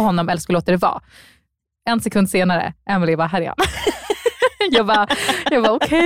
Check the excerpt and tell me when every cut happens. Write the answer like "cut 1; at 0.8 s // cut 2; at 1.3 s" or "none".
none